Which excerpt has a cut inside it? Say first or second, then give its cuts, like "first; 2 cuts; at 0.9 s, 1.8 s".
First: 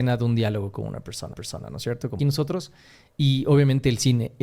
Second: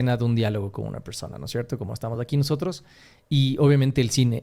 first; 2 cuts; at 1.3 s, 2.2 s